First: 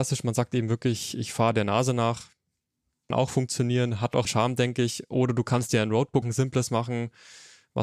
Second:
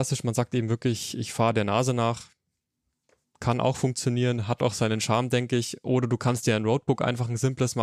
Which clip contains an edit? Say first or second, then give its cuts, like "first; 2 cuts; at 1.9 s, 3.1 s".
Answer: first; 3 cuts; at 3.1 s, 4.3 s, 6.2 s